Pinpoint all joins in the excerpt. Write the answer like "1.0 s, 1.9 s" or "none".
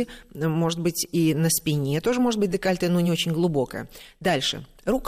none